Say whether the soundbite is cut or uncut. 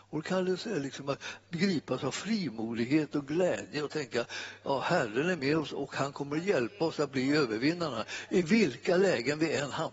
uncut